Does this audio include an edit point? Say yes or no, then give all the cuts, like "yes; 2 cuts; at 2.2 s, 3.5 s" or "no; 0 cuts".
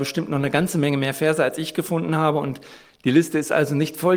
no; 0 cuts